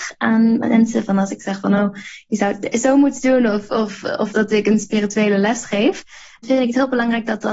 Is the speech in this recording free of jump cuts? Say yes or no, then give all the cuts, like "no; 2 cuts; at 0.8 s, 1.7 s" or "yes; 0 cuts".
yes; 0 cuts